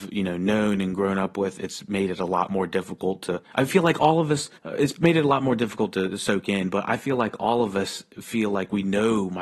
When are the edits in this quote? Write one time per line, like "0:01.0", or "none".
0:03.5
0:04.6